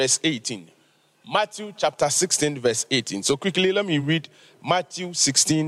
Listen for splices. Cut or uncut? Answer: uncut